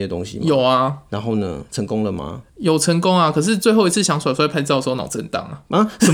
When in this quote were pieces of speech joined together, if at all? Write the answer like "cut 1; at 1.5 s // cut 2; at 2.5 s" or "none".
cut 1; at 2.5 s